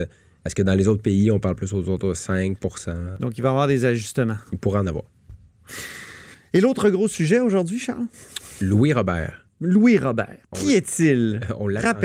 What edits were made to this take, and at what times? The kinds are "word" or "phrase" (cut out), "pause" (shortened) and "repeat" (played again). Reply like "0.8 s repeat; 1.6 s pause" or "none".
10.4 s pause